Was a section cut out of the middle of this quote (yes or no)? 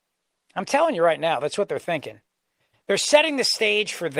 no